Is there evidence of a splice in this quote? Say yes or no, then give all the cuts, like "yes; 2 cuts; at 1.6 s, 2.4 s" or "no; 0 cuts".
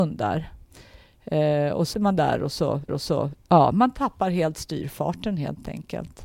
yes; 2 cuts; at 1.9 s, 2.9 s